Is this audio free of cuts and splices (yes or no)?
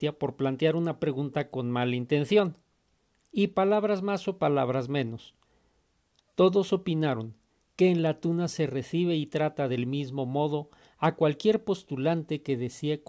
yes